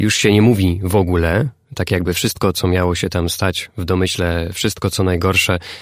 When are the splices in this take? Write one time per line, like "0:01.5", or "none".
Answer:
none